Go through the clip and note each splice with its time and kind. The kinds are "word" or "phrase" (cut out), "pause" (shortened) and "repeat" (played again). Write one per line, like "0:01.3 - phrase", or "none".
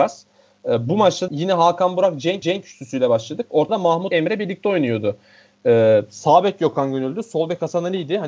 0:01.3 - word
0:02.4 - repeat
0:03.7 - word
0:04.1 - word

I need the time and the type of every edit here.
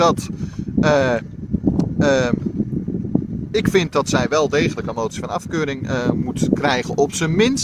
none

